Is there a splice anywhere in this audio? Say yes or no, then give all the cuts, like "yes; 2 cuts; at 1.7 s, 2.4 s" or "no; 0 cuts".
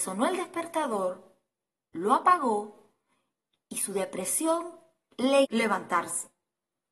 yes; 1 cut; at 5.4 s